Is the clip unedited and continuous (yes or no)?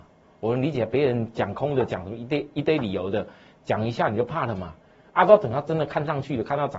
yes